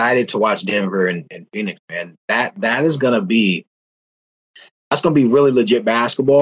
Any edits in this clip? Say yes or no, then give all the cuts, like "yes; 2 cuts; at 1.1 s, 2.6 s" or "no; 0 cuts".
no; 0 cuts